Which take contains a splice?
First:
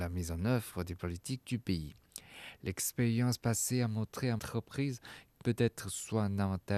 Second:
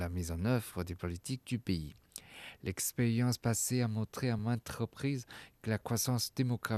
first; 2 cuts; at 4.4 s, 5.4 s

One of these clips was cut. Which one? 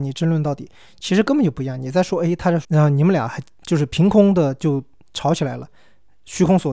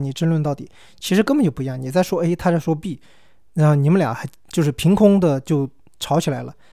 first; 1 cut; at 2.6 s

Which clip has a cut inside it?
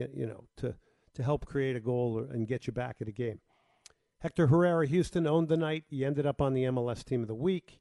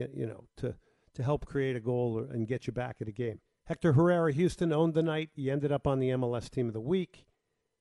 second; 1 cut; at 3.5 s

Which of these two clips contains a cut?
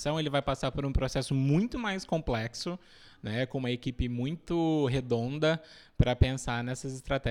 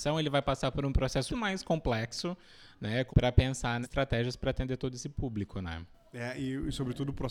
second; 3 cuts; at 1.3 s, 3.1 s, 3.8 s

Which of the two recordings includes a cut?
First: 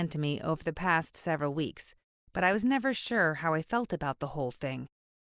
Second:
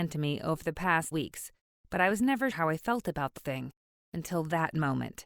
second; 3 cuts; at 1.1 s, 2.5 s, 3.4 s

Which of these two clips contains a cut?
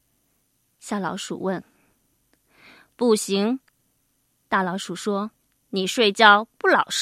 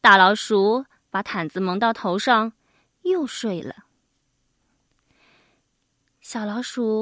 first; 1 cut; at 5.4 s

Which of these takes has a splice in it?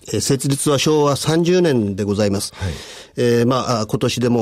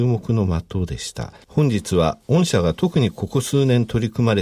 second; 1 cut; at 1.4 s

